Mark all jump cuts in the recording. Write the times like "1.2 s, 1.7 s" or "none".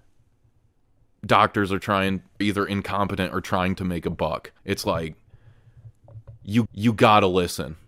2.4 s, 4.6 s, 6.7 s